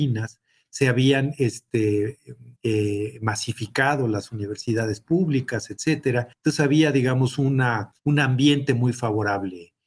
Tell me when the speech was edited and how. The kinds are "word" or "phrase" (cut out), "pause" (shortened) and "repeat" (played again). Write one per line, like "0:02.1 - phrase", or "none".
0:02.6 - pause
0:06.3 - pause
0:08.0 - pause